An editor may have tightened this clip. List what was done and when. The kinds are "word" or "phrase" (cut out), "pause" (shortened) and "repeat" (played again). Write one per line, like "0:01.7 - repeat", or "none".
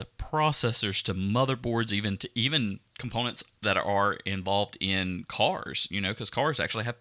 0:02.9 - pause